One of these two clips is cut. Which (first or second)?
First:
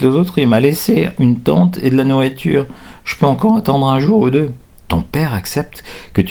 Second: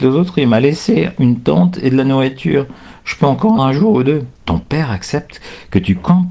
second